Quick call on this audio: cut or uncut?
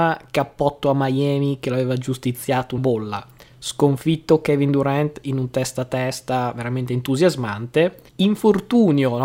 cut